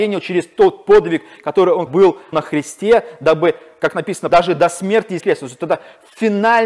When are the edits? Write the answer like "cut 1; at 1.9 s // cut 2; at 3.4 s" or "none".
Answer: cut 1; at 1.9 s // cut 2; at 2.3 s // cut 3; at 4.3 s // cut 4; at 5.2 s